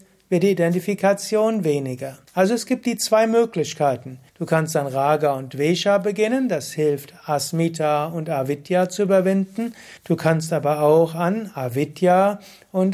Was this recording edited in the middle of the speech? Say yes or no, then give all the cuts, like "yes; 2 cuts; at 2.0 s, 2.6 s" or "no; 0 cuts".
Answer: yes; 3 cuts; at 2.3 s, 4.3 s, 10.0 s